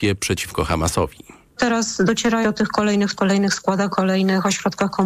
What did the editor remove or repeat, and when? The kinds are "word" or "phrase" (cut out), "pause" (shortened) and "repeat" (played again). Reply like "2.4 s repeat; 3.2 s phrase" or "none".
1.5 s pause; 2.4 s word; 3.2 s word; 3.9 s word